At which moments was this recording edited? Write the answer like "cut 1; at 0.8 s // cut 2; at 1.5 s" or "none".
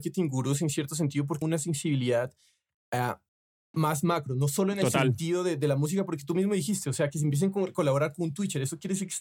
cut 1; at 1.4 s